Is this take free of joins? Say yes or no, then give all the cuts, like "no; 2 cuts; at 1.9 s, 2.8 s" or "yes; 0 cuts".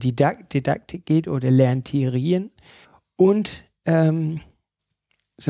no; 1 cut; at 2.8 s